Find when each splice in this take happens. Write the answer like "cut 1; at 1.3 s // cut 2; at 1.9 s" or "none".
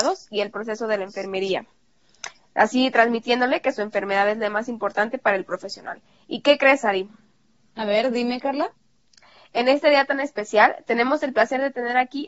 none

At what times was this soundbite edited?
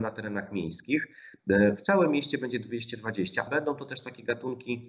cut 1; at 3.5 s

